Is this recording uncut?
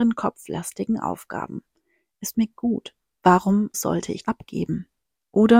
no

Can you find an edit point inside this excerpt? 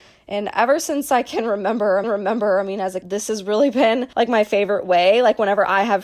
yes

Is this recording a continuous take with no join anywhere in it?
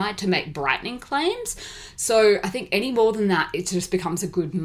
yes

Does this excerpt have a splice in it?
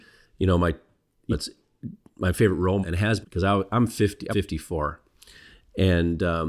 yes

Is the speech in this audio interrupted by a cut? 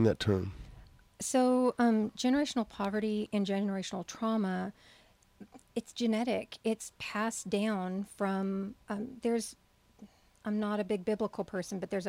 no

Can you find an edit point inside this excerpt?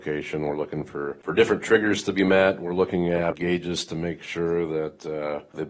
yes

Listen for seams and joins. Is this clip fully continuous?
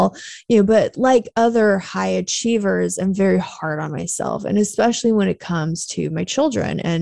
yes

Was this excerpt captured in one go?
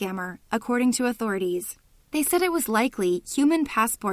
yes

